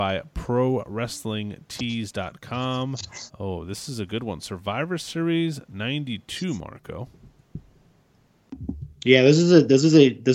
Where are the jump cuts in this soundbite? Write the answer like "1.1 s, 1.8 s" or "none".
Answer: 3.3 s